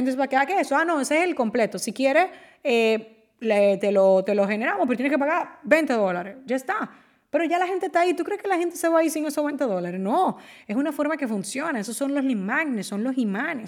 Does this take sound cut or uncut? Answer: uncut